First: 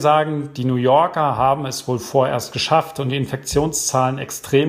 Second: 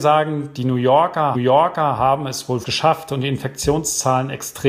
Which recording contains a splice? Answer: second; 2 cuts; at 1.3 s, 2.6 s

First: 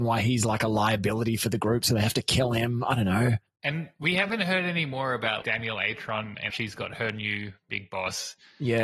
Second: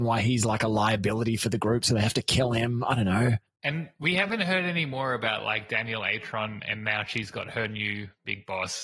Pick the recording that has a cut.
first; 2 cuts; at 5.4 s, 6.5 s

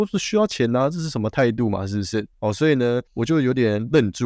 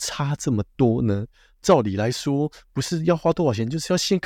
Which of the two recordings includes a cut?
first; 2 cuts; at 2.3 s, 3.1 s

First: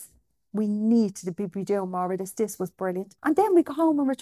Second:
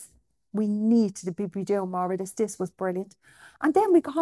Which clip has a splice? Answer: first; 1 cut; at 3.2 s

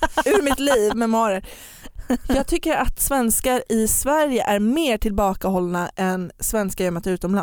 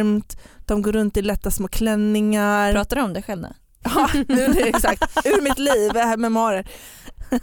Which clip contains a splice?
first; 1 cut; at 0.9 s

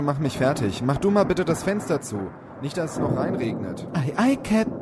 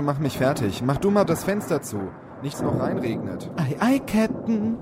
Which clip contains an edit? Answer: second; 2 cuts; at 1.3 s, 2.5 s

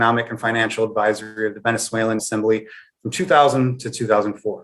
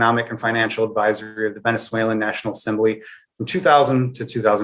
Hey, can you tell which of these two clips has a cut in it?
first; 1 cut; at 2.2 s

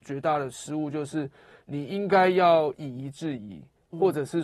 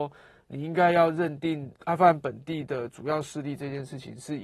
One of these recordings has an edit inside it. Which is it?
second; 1 cut; at 1.8 s

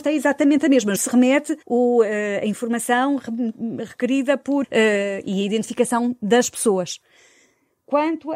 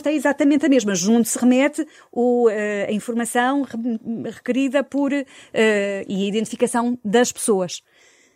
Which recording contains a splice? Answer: first; 3 cuts; at 1.0 s, 1.6 s, 4.6 s

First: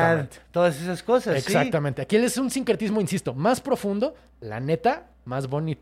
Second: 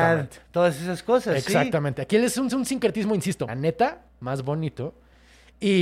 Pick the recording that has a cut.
second; 2 cuts; at 2.5 s, 3.5 s

